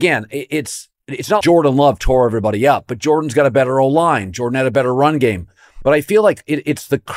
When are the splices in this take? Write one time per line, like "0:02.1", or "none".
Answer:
0:01.4